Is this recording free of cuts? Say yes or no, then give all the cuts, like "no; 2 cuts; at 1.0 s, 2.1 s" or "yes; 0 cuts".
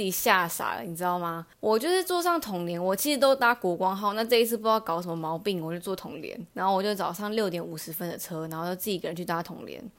no; 2 cuts; at 1.5 s, 6.5 s